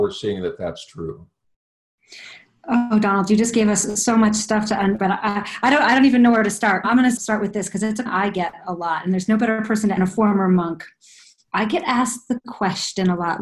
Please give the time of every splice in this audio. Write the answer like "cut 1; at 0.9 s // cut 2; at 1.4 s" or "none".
cut 1; at 5.0 s // cut 2; at 6.8 s // cut 3; at 7.2 s // cut 4; at 8.1 s // cut 5; at 10.0 s